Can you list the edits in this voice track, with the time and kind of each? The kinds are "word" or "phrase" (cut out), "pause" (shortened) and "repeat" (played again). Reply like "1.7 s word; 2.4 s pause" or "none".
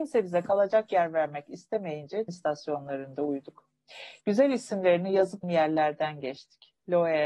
2.3 s word; 5.4 s word